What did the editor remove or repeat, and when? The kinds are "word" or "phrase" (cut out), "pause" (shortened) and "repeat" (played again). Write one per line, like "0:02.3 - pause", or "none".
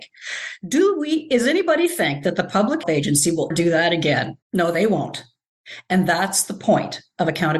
0:02.8 - word
0:03.5 - word
0:04.4 - pause

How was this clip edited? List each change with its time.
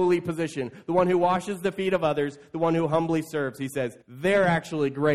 0:04.0 - pause

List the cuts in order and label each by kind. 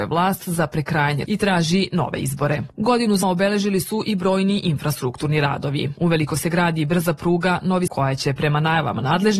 0:01.2 - word
0:03.2 - word
0:07.9 - word

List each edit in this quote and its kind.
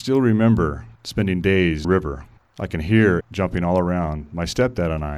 0:01.0 - pause
0:01.8 - phrase
0:02.4 - pause
0:03.2 - phrase

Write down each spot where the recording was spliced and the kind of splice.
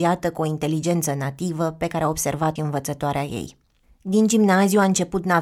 0:02.6 - word

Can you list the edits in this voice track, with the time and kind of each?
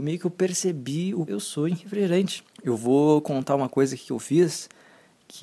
0:01.3 - phrase
0:02.5 - pause

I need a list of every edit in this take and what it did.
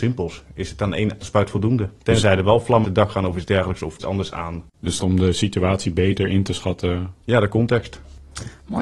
0:01.2 - word
0:02.8 - word
0:04.0 - phrase
0:05.0 - word
0:07.2 - pause

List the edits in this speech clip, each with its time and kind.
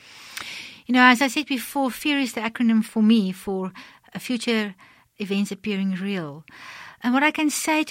none

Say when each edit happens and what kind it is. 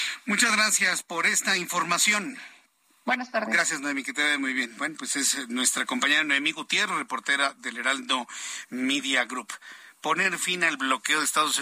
0:02.8 - pause

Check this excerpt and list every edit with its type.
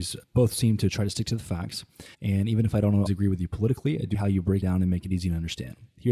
0:02.1 - pause
0:03.1 - word
0:04.1 - word
0:04.6 - word

